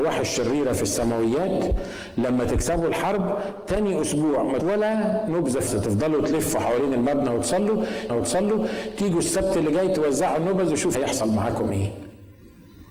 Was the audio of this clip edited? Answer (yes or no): yes